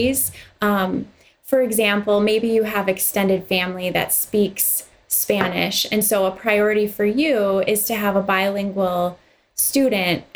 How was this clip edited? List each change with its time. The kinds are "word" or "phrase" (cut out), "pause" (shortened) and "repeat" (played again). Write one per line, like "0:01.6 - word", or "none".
none